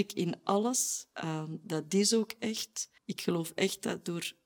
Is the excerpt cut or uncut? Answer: cut